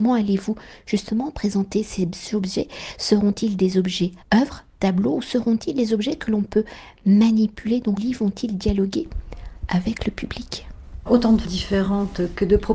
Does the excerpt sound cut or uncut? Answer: cut